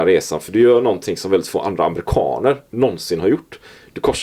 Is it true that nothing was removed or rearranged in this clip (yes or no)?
yes